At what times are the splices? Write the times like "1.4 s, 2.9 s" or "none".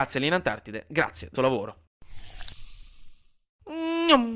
1.3 s